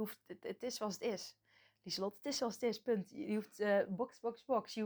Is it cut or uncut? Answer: uncut